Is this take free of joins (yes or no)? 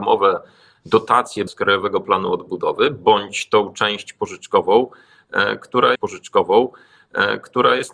no